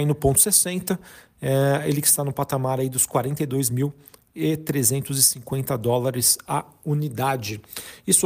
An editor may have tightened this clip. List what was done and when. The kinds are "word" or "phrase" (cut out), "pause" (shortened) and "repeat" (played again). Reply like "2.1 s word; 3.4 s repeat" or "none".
none

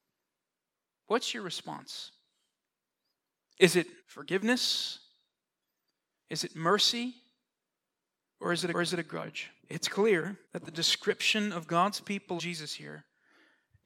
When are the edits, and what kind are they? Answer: 4.0 s pause; 8.7 s repeat; 9.6 s pause; 10.4 s pause; 12.4 s phrase

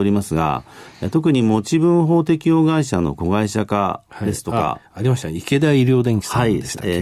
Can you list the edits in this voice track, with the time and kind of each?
none

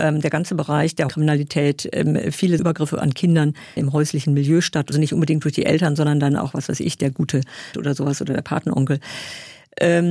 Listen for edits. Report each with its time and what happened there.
1.1 s word; 2.6 s word; 3.8 s word; 4.9 s phrase; 7.7 s word

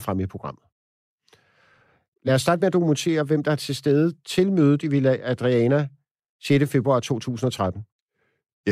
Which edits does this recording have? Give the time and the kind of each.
none

